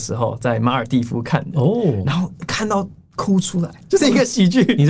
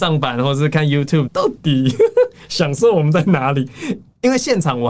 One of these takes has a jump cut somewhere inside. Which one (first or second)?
second